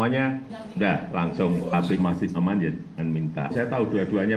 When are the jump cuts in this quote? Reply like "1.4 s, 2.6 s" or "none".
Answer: 2.0 s, 2.3 s, 3.0 s

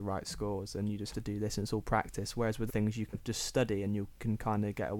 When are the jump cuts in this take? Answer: 1.1 s, 2.7 s, 3.1 s

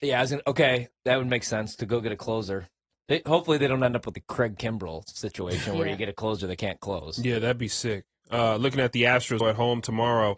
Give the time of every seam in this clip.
4.1 s, 9.4 s

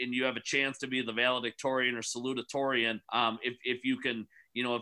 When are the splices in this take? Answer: 3.0 s

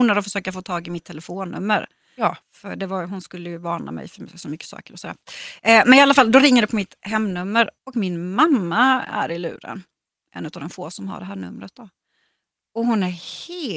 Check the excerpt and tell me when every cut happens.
2.4 s, 7.8 s

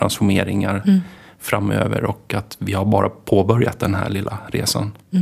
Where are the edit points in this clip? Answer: none

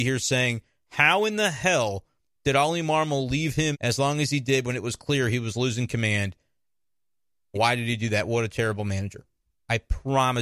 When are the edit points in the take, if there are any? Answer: 3.7 s, 7.5 s

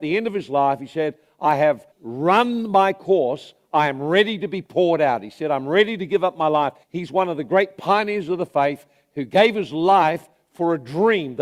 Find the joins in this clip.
1.9 s, 6.8 s

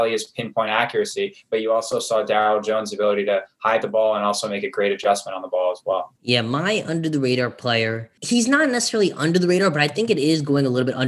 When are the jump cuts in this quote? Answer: 3.8 s

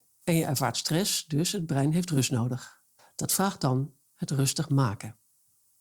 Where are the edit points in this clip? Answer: 3.0 s

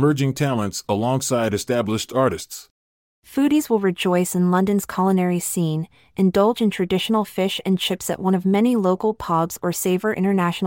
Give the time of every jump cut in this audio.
none

